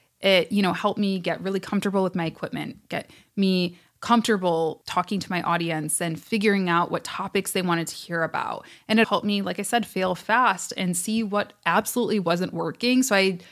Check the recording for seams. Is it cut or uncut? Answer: cut